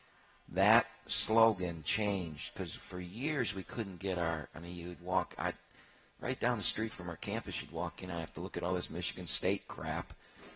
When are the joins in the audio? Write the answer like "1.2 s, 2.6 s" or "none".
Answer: none